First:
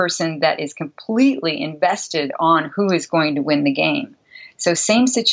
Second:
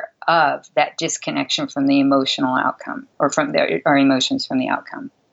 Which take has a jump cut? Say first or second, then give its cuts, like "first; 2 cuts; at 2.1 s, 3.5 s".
second; 1 cut; at 3.1 s